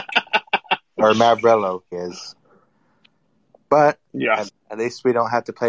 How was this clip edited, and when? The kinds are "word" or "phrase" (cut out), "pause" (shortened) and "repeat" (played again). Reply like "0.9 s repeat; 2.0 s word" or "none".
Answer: 1.9 s word; 4.5 s word